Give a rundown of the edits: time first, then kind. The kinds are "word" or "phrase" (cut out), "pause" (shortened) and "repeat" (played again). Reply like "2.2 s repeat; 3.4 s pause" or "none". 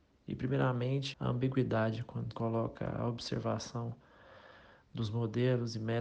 1.1 s word; 2.3 s word